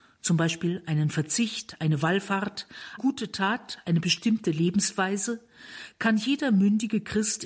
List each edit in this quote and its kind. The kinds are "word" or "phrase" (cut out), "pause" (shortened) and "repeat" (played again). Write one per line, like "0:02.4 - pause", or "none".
0:03.0 - word

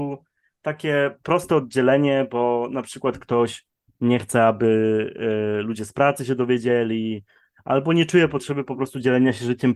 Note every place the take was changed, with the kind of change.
none

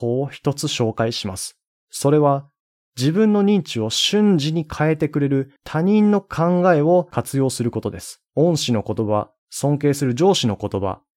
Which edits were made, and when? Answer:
0:01.8 - pause
0:05.6 - pause
0:08.3 - pause
0:09.4 - pause

